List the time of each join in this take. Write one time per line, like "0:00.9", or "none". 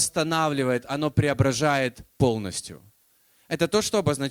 none